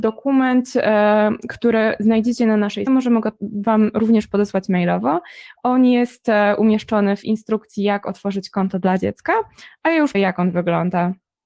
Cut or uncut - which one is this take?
cut